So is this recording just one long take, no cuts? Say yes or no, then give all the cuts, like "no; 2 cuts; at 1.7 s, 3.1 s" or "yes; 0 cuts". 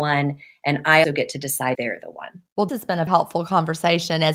no; 4 cuts; at 1.0 s, 1.7 s, 2.7 s, 3.1 s